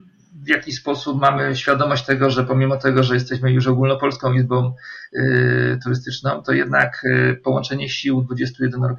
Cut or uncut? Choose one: uncut